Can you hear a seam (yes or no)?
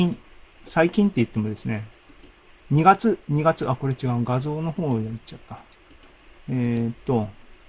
no